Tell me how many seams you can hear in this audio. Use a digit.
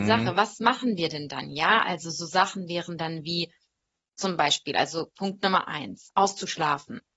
1